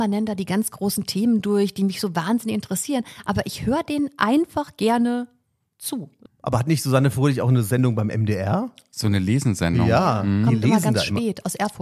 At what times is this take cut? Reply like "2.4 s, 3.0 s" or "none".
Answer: none